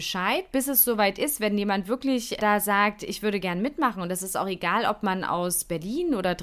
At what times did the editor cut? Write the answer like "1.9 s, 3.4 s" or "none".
2.4 s